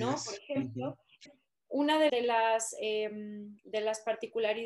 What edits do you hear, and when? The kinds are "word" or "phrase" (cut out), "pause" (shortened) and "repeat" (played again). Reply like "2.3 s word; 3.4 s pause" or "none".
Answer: 1.3 s word; 2.1 s word; 3.6 s pause